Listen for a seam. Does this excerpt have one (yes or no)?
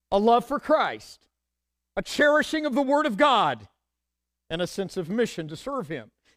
no